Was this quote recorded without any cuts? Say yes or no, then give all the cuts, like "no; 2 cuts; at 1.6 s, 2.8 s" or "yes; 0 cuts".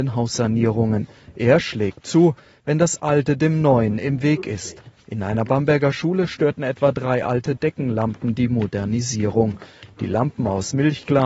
yes; 0 cuts